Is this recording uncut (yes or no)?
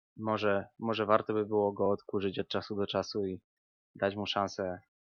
yes